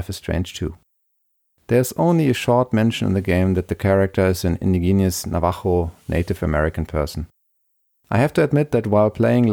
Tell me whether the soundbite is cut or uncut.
uncut